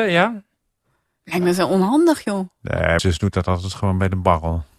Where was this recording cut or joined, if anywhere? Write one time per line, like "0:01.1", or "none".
0:03.0